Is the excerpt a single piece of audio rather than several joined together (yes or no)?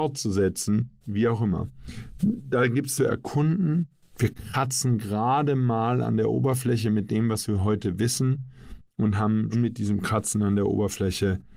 no